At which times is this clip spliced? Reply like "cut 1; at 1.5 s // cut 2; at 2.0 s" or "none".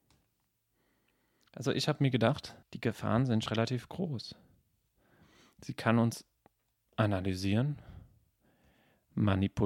cut 1; at 2.6 s // cut 2; at 3.5 s